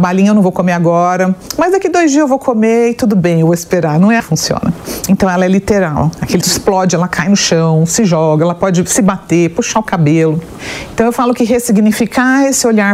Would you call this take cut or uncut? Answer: cut